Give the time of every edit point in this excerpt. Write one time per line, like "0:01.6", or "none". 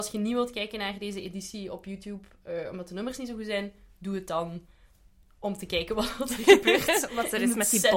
none